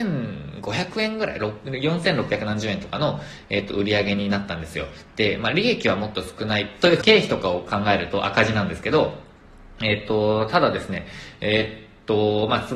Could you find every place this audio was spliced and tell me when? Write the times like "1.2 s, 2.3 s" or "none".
7.0 s